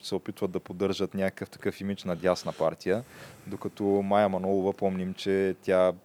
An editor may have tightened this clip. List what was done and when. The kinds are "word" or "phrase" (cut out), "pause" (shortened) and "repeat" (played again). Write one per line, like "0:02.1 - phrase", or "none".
none

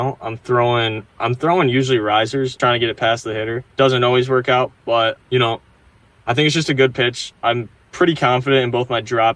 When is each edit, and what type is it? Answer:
0:02.6 - word
0:03.7 - pause
0:05.2 - word

